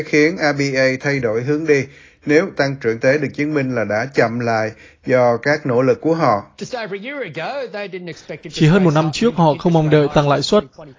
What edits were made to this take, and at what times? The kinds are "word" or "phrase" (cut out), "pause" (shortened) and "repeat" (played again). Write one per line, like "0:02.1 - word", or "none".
0:03.0 - word